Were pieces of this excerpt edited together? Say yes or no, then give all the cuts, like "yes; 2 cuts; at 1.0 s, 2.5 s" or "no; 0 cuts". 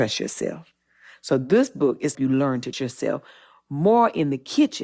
yes; 2 cuts; at 2.1 s, 2.7 s